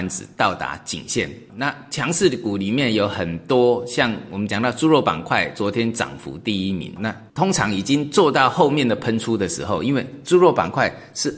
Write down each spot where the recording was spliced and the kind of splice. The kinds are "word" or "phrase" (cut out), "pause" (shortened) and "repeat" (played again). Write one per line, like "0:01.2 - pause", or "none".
0:01.5 - word
0:07.0 - word
0:07.3 - pause